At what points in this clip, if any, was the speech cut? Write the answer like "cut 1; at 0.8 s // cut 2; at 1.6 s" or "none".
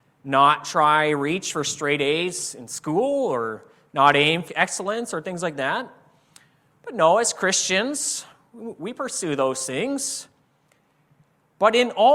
cut 1; at 4.5 s